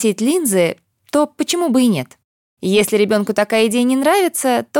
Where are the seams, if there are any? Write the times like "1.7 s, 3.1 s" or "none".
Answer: none